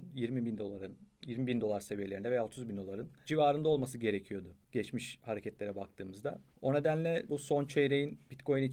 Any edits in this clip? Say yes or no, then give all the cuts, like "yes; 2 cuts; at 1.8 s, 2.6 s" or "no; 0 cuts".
yes; 2 cuts; at 4.6 s, 7.3 s